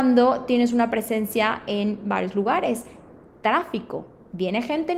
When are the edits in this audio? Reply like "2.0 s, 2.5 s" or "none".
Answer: none